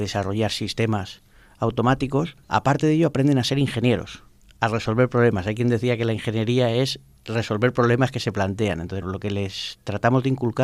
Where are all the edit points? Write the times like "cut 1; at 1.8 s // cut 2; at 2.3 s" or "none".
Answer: cut 1; at 2.4 s // cut 2; at 9.0 s